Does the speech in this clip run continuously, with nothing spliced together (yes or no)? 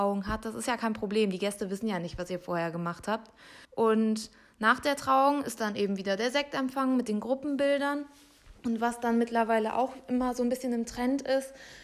no